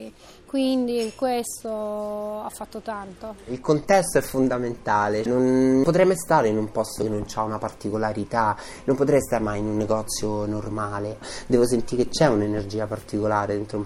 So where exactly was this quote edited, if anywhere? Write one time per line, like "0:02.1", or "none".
0:05.3
0:05.8